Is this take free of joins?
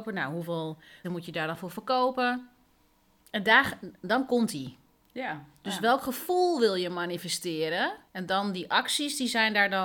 no; 2 cuts; at 1.0 s, 8.1 s

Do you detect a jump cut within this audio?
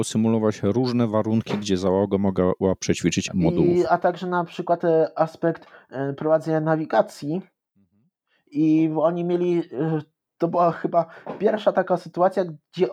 yes; 1 cut; at 3.3 s

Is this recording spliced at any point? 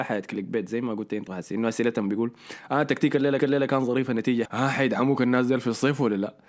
yes; 3 cuts; at 1.3 s, 3.4 s, 4.4 s

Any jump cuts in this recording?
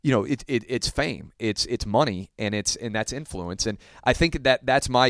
no; 0 cuts

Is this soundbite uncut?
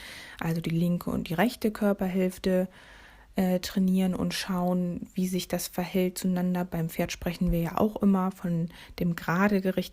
yes; 0 cuts

